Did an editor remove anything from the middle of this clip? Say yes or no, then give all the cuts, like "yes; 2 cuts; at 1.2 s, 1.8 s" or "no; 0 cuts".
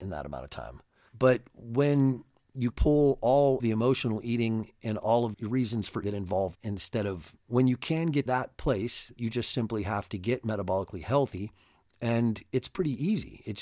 yes; 8 cuts; at 2.7 s, 3.6 s, 5.3 s, 6.0 s, 6.5 s, 7.4 s, 8.3 s, 9.2 s